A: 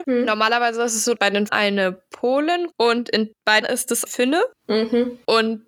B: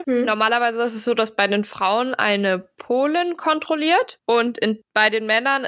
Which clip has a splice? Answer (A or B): A